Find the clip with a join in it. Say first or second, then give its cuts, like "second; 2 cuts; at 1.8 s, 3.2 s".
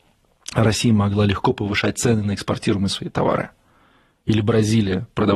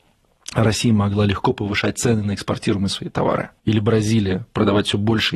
second; 1 cut; at 3.6 s